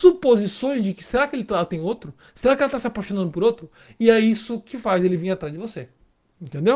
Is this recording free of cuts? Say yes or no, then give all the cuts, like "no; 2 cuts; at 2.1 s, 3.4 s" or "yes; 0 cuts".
yes; 0 cuts